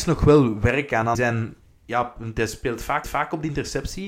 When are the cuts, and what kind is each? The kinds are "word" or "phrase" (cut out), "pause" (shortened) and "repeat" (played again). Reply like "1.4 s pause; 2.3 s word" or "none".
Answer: 1.1 s word; 1.6 s pause; 3.0 s repeat